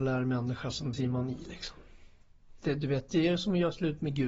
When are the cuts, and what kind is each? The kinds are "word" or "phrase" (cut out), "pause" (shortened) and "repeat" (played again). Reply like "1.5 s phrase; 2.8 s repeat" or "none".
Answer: 0.9 s word